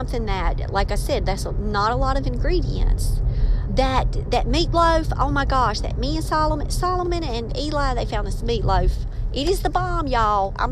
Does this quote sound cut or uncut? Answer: cut